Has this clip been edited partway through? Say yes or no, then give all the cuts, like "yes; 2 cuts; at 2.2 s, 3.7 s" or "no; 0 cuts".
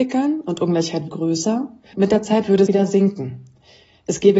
yes; 3 cuts; at 1.1 s, 1.9 s, 2.7 s